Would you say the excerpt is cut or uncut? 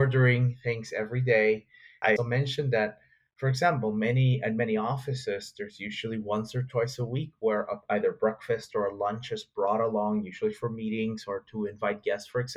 cut